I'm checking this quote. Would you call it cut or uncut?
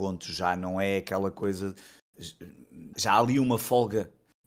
cut